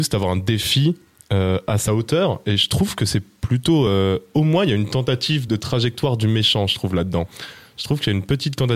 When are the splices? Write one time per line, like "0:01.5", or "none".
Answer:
none